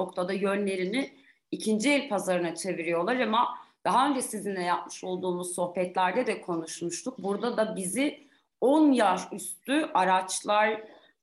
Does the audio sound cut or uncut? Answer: uncut